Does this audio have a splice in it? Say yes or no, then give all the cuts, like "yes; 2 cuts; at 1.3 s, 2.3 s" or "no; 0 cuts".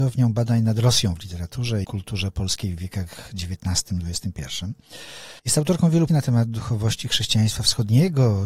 yes; 3 cuts; at 1.8 s, 5.4 s, 6.1 s